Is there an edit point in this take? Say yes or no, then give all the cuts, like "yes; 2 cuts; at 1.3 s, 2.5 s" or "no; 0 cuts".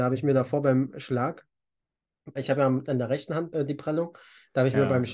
yes; 2 cuts; at 2.4 s, 3.5 s